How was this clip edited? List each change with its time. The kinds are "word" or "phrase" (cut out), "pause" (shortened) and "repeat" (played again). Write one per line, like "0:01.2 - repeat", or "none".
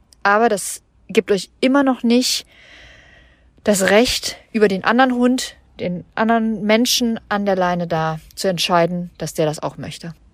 none